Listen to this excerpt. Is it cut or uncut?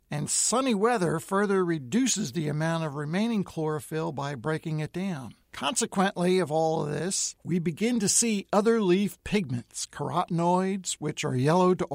cut